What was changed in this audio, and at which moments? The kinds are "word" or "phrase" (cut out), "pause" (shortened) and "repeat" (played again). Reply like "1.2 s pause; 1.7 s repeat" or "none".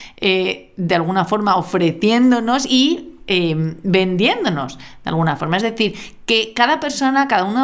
none